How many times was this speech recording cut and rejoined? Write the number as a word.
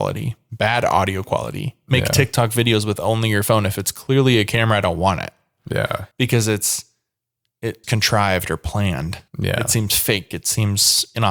three